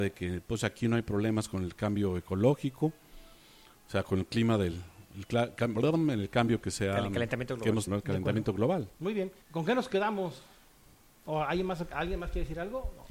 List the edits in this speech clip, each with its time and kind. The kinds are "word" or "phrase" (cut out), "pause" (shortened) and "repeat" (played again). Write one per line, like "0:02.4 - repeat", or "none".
0:07.9 - word
0:08.9 - pause
0:09.4 - pause